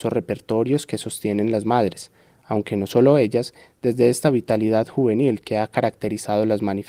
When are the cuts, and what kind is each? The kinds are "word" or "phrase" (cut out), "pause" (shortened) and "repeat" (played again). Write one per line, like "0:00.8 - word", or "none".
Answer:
none